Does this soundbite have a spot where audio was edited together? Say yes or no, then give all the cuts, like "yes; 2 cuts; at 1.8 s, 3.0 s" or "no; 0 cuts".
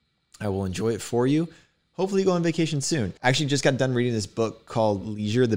yes; 1 cut; at 3.2 s